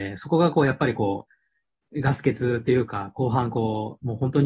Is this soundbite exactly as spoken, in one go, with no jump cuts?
yes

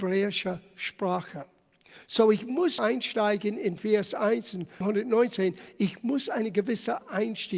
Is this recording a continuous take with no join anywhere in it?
no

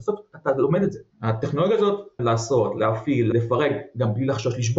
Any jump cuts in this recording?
yes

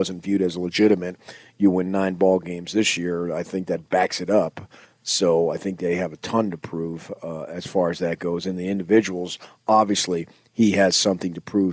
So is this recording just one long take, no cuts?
yes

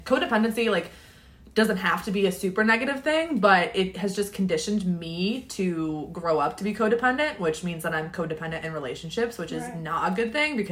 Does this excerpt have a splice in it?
no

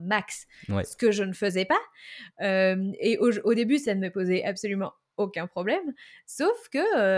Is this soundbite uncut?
yes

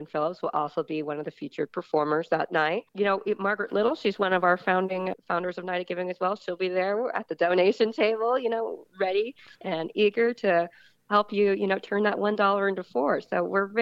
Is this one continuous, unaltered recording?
no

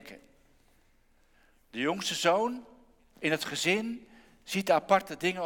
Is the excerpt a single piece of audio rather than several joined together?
yes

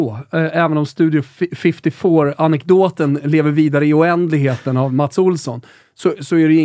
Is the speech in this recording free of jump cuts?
yes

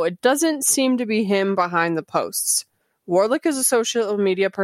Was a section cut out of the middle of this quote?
yes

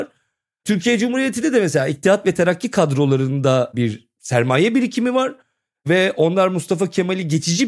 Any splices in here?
no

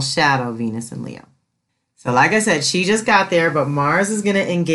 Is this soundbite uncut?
yes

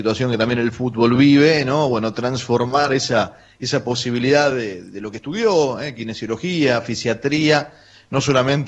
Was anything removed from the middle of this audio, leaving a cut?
no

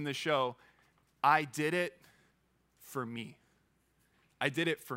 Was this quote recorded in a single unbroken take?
yes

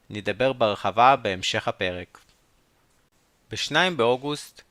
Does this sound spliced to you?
no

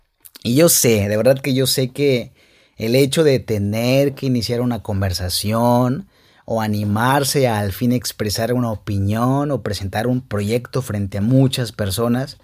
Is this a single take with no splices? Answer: yes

